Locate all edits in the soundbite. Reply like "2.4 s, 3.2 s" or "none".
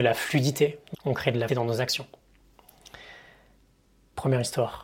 0.9 s, 1.5 s